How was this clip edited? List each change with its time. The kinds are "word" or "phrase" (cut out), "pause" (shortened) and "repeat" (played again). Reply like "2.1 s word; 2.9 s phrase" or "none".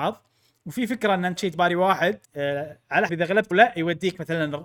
1.4 s word; 2.2 s pause; 3.1 s word; 3.5 s word